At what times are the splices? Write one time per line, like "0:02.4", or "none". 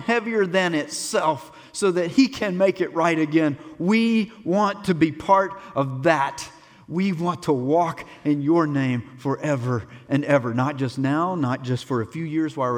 none